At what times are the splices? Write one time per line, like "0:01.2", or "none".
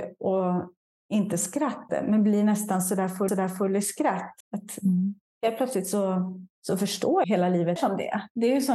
0:01.0
0:01.9
0:03.3
0:04.4
0:06.5
0:07.2
0:07.8